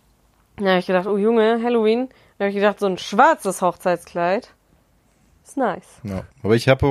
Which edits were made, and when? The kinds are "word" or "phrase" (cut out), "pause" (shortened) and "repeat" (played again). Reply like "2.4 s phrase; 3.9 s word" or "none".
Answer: none